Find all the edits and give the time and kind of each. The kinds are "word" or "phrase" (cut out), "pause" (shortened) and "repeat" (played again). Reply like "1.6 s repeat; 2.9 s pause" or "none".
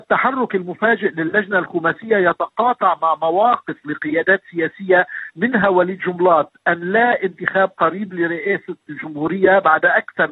none

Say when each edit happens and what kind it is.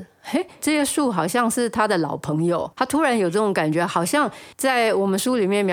2.7 s word; 4.5 s pause

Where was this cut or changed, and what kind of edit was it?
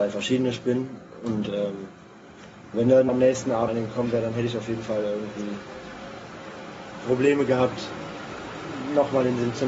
2.7 s word; 3.1 s word; 3.7 s word

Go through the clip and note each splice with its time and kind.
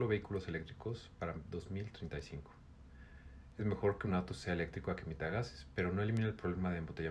none

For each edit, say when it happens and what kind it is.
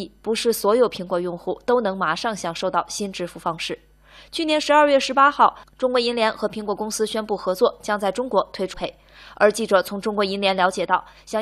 8.7 s word

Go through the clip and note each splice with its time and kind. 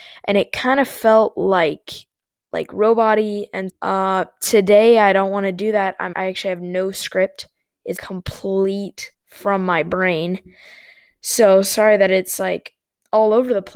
3.7 s word; 6.1 s word; 8.0 s word; 9.1 s pause

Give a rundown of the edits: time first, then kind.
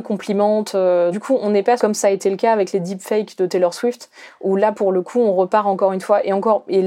1.1 s word; 1.8 s phrase

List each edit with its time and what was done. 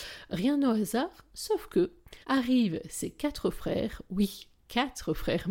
2.2 s pause

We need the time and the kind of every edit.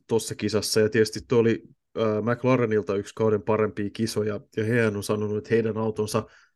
none

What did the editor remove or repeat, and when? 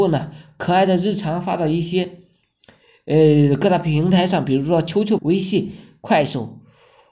5.2 s word

